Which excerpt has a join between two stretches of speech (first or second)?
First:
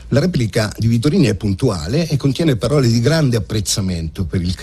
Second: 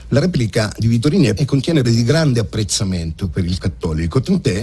second